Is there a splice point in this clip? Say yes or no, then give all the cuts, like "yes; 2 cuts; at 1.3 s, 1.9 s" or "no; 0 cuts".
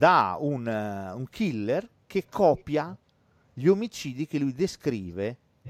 no; 0 cuts